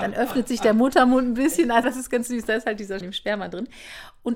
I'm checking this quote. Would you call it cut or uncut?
cut